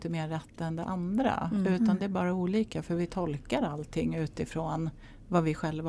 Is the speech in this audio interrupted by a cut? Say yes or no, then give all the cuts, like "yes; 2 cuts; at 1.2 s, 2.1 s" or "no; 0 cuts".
no; 0 cuts